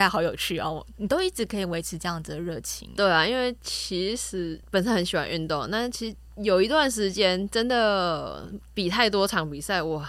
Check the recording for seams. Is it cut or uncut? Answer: cut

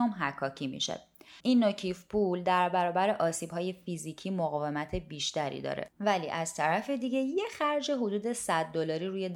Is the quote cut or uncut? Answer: cut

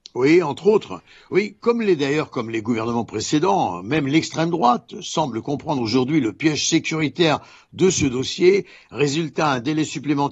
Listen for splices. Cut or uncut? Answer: uncut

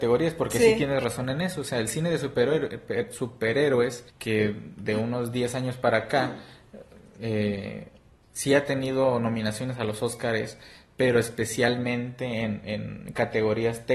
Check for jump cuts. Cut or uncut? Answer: cut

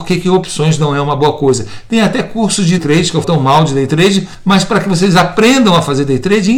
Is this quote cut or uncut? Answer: cut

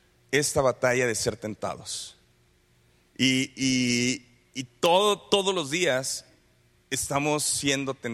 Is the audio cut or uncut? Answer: uncut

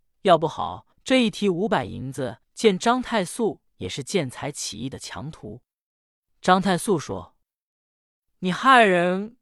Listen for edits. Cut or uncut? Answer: cut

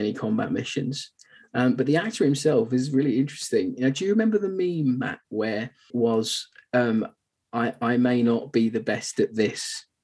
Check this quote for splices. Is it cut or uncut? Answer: uncut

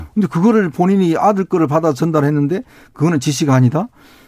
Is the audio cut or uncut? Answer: uncut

